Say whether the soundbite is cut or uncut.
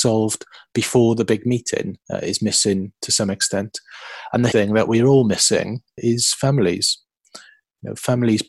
cut